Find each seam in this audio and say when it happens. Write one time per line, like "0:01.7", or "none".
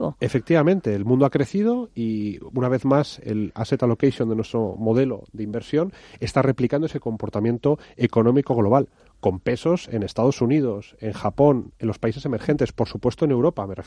none